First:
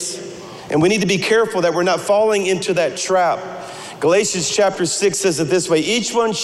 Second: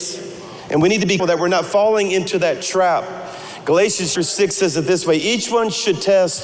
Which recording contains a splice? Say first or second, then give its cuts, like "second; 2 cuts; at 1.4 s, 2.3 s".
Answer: second; 2 cuts; at 1.2 s, 4.2 s